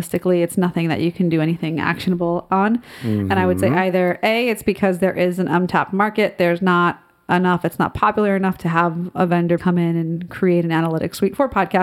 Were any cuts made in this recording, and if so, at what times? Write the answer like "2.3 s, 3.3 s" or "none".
9.6 s

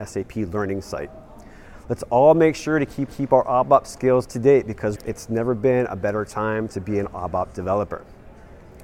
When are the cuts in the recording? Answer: 3.1 s, 4.2 s, 5.0 s

